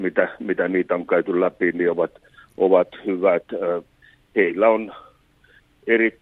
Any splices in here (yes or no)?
no